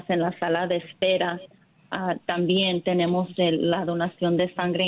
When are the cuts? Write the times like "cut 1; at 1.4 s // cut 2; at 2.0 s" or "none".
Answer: none